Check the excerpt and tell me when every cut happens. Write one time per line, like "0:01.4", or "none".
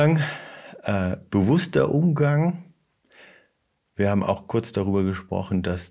none